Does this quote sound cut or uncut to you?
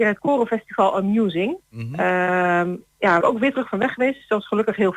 cut